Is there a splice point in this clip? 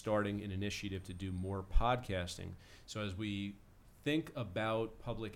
no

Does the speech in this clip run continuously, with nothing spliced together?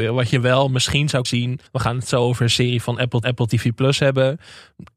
no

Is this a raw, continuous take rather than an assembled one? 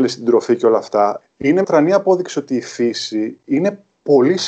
no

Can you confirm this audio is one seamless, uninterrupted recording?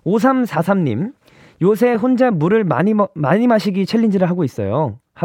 yes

